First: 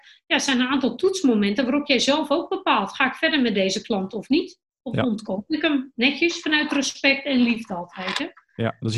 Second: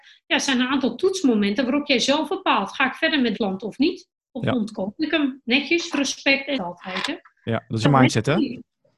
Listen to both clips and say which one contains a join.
second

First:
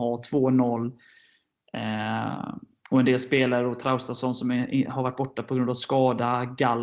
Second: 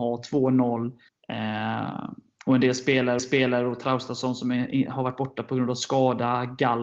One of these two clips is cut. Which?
second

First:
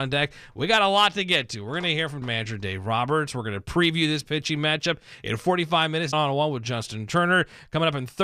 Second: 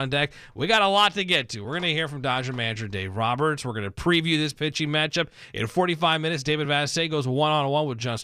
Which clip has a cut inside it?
first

